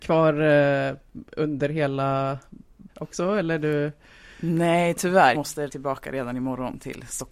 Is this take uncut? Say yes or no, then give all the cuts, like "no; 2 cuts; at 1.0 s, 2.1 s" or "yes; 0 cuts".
no; 3 cuts; at 2.9 s, 5.3 s, 5.7 s